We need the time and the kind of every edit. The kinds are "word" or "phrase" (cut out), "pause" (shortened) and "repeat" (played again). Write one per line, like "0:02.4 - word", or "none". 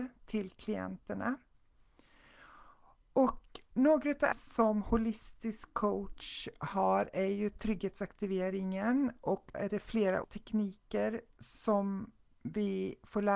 0:04.3 - word
0:09.5 - word
0:10.2 - word